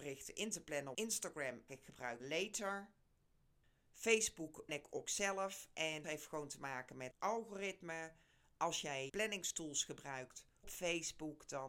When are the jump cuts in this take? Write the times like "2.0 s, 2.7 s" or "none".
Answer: 0.9 s, 1.7 s, 2.2 s, 4.7 s, 5.0 s, 6.0 s, 7.1 s, 9.1 s, 10.6 s